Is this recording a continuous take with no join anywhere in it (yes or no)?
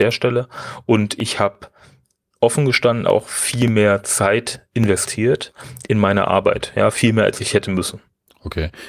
yes